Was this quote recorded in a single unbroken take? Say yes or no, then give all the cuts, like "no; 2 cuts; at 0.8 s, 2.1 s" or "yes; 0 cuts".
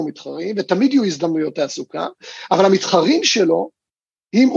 yes; 0 cuts